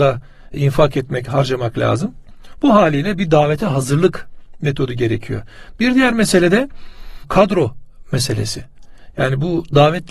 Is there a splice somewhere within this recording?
no; 0 cuts

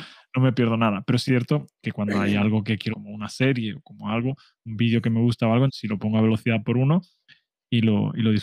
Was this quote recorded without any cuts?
no; 3 cuts; at 1.3 s, 2.9 s, 5.7 s

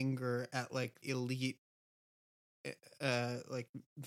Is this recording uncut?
no; 1 cut; at 1.0 s

